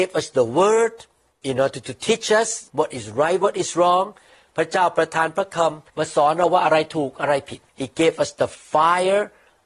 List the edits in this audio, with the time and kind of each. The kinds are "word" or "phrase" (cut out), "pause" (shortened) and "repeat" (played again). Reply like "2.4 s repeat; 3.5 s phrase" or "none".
1.3 s pause; 2.7 s pause; 5.9 s pause; 7.7 s pause